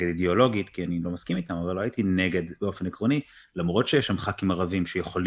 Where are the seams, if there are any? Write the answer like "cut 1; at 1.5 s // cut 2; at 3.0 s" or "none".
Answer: none